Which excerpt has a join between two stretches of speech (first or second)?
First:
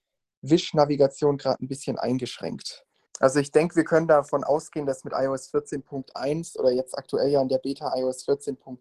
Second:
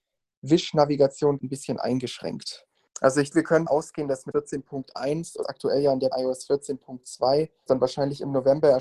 second